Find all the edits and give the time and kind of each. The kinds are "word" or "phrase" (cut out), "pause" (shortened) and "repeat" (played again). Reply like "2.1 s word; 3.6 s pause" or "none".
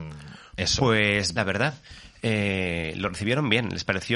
1.4 s word